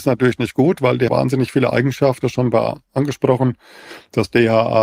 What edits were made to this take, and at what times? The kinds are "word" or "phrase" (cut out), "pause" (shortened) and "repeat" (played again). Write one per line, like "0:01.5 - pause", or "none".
0:01.1 - word
0:02.2 - word

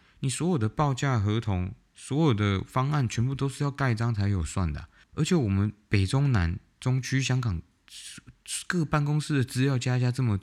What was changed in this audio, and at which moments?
none

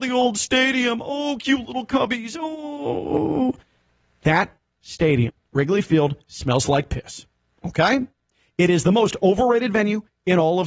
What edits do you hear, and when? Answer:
none

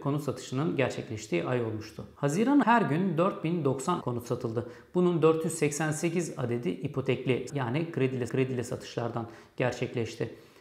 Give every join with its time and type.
0:02.6 - word
0:04.0 - word
0:07.5 - word
0:08.3 - repeat

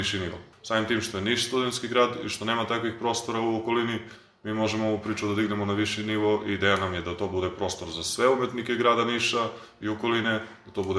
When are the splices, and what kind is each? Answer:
none

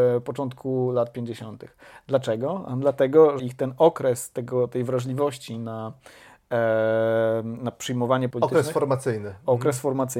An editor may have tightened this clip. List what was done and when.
0:03.4 - word
0:08.3 - word

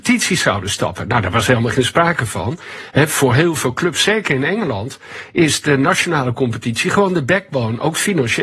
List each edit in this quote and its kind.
none

